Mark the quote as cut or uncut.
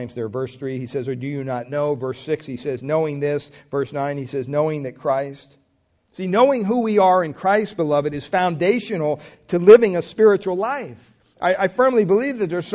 cut